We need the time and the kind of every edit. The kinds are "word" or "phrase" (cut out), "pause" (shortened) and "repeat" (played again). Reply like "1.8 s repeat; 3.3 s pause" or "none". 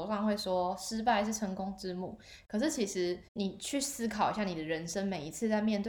3.3 s pause